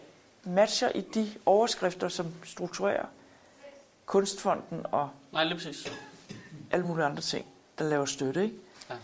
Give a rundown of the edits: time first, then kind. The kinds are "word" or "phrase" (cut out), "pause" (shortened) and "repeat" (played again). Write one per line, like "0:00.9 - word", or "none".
none